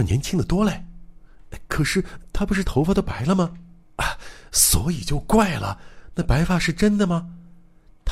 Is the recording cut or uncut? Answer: cut